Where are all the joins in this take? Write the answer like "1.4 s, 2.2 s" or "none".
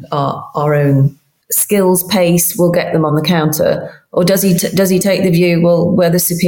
none